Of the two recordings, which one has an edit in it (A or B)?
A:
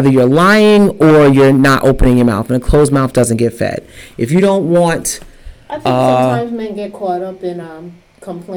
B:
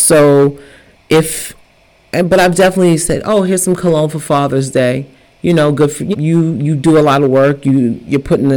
B